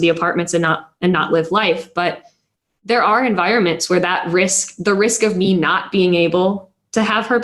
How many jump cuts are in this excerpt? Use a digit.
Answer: 0